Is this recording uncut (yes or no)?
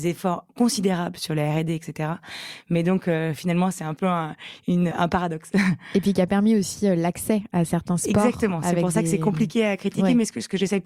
no